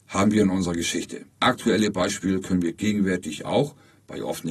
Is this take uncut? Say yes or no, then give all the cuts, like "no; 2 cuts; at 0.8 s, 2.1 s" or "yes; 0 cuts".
no; 1 cut; at 1.3 s